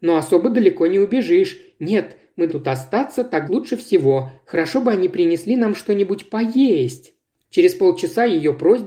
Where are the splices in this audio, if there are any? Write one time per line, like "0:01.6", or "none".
0:02.5
0:03.5
0:07.3